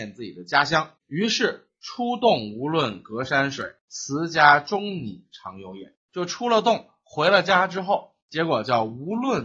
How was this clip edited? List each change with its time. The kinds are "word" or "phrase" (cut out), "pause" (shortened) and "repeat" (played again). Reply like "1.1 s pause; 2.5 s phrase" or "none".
1.0 s pause; 3.8 s pause; 6.0 s pause; 8.2 s pause